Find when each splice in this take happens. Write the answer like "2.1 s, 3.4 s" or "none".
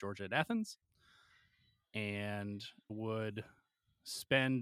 2.9 s